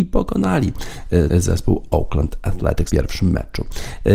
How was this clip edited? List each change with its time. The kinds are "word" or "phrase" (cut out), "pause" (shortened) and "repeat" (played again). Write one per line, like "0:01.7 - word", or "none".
0:01.3 - word
0:02.9 - word